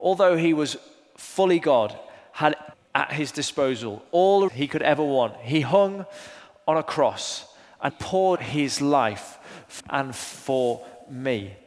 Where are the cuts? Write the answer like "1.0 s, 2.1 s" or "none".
2.7 s, 4.5 s, 7.9 s, 8.4 s, 9.8 s

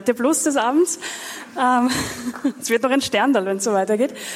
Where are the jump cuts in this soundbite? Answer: none

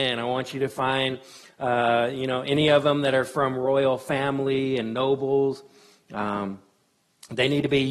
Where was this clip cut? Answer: none

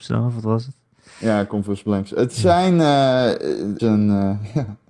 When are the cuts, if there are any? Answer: 3.8 s

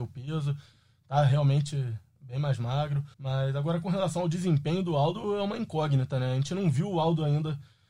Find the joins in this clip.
3.1 s

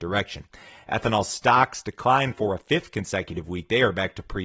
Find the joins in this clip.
none

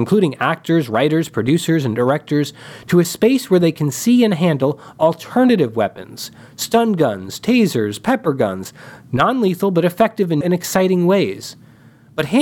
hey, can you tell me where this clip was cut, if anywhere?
10.4 s

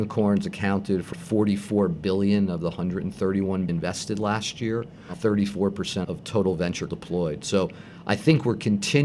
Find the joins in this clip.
1.1 s, 3.7 s, 5.1 s, 6.0 s, 6.9 s

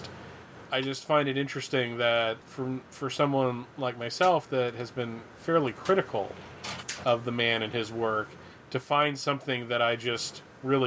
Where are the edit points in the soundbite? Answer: 2.4 s

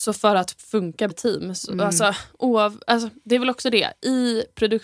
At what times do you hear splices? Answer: 1.1 s

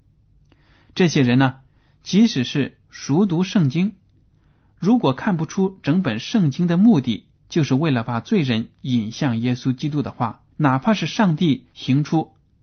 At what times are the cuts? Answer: 2.8 s, 7.4 s, 10.5 s, 11.7 s

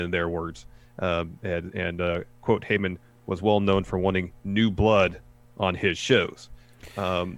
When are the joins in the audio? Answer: none

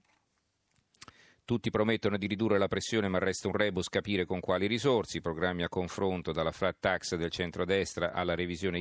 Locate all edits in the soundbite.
none

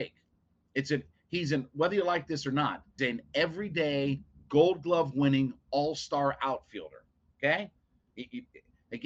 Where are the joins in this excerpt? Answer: 3.0 s

